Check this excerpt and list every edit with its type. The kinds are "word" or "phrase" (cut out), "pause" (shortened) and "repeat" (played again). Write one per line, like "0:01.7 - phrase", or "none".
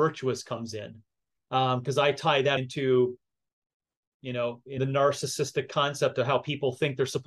0:02.6 - word
0:04.8 - phrase